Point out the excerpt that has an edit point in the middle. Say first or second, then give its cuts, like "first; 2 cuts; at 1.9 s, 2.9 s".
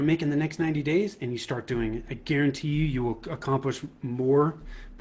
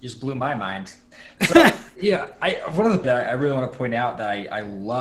second; 1 cut; at 3.0 s